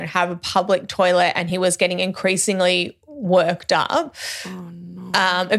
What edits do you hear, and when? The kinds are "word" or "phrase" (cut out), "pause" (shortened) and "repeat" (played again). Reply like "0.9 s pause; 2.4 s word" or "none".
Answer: none